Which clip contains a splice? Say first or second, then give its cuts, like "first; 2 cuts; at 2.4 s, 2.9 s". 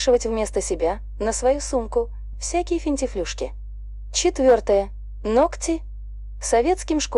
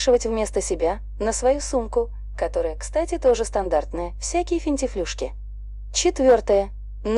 first; 1 cut; at 2.3 s